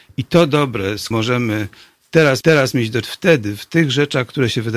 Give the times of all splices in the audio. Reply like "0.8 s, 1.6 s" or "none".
1.1 s, 2.4 s, 3.0 s